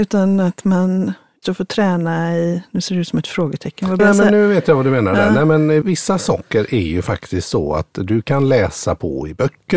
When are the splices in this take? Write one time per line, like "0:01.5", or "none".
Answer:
0:01.4
0:04.0
0:05.8